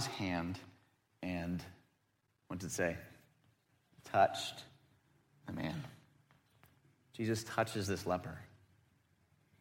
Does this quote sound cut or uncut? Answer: uncut